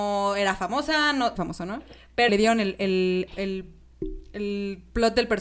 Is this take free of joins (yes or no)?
no